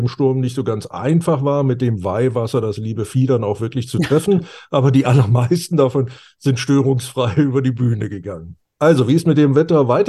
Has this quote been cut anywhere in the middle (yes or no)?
no